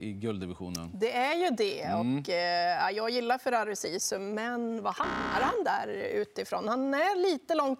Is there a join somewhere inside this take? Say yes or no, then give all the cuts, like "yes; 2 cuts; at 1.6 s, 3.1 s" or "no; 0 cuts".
no; 0 cuts